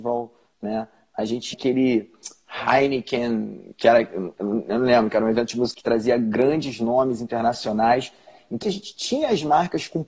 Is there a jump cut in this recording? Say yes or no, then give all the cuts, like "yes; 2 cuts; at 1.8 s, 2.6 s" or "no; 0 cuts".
yes; 3 cuts; at 1.5 s, 5.7 s, 8.6 s